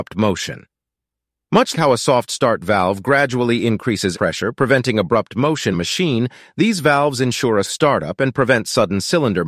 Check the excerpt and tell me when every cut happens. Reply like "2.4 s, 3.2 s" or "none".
1.7 s, 4.1 s, 5.7 s, 7.6 s